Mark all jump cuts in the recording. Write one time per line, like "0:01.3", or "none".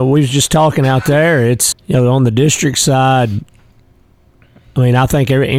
0:01.7